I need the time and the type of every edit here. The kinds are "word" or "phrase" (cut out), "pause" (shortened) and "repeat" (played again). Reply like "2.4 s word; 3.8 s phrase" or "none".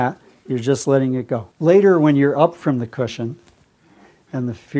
1.5 s pause